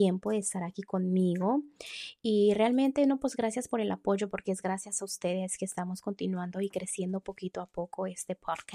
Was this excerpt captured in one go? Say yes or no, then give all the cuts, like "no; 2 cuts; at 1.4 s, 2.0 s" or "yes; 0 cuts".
yes; 0 cuts